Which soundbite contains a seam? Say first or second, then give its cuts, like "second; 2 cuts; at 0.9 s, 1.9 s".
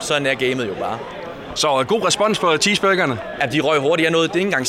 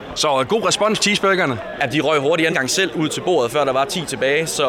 second; 2 cuts; at 1.0 s, 2.5 s